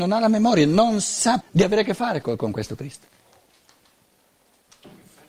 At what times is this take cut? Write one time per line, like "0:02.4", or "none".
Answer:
0:01.4
0:02.2